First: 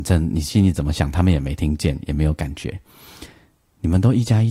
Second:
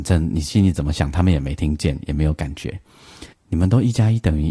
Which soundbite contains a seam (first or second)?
second